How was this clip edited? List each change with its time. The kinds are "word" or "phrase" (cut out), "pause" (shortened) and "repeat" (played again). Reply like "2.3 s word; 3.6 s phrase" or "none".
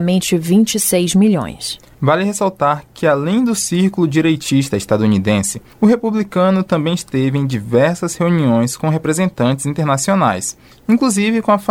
none